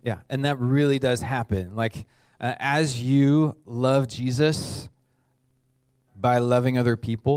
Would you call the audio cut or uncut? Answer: uncut